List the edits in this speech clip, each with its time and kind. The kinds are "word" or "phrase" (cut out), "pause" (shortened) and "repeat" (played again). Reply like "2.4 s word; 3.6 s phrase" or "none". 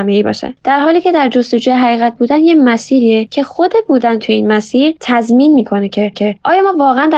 6.1 s repeat